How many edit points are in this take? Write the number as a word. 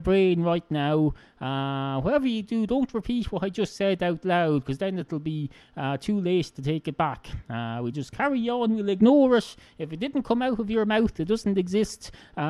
zero